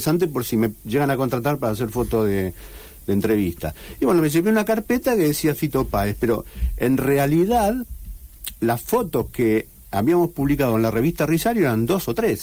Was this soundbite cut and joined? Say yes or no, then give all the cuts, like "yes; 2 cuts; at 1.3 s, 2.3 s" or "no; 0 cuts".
no; 0 cuts